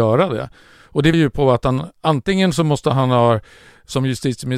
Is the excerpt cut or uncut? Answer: cut